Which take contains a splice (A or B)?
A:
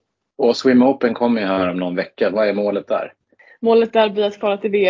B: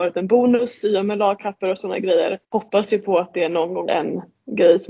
B